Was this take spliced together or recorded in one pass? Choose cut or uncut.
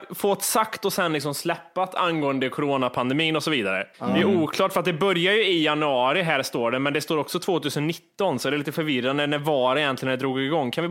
cut